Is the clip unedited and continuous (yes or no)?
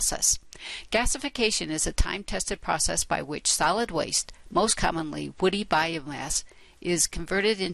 yes